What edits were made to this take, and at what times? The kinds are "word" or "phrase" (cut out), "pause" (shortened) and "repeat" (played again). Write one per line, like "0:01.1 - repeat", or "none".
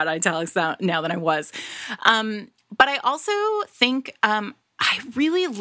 none